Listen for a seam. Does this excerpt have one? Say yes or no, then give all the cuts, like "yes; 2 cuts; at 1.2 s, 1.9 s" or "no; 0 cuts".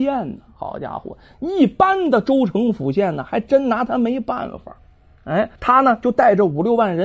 yes; 1 cut; at 5.6 s